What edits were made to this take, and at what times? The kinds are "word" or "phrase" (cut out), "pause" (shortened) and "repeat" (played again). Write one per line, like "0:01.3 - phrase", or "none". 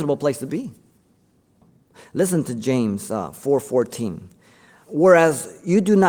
none